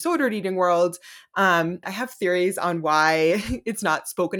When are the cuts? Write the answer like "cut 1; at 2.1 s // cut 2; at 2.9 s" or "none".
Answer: cut 1; at 1.8 s